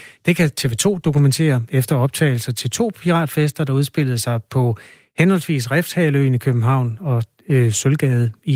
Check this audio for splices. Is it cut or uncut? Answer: uncut